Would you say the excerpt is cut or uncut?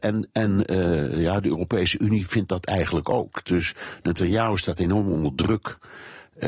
uncut